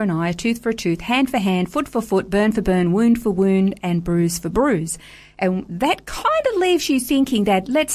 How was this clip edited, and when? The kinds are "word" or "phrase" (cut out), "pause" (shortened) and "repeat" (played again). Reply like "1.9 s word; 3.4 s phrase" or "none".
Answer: none

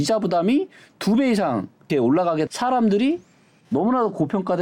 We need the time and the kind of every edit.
1.9 s word; 2.5 s word

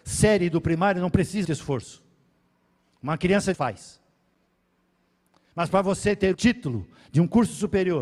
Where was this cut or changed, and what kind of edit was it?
1.4 s word; 3.5 s phrase; 6.3 s word

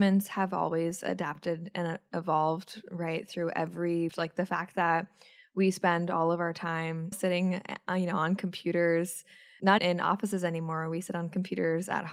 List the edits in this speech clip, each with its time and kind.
4.1 s phrase; 7.1 s word; 9.8 s word

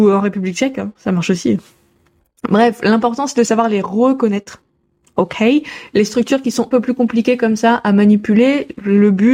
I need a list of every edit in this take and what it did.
6.7 s word

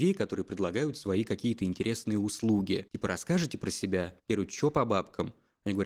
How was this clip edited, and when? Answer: 2.9 s pause; 4.2 s pause

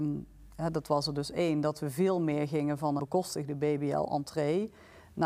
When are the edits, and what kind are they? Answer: 3.0 s word

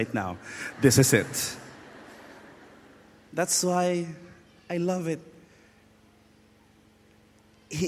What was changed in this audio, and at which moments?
none

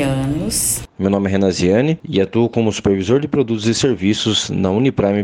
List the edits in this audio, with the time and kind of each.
none

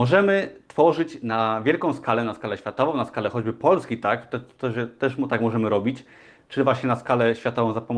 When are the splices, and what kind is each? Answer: none

